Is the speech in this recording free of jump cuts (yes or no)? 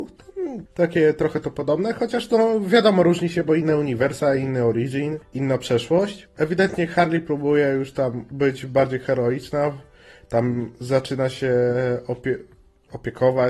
yes